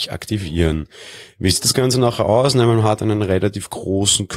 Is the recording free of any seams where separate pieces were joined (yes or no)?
yes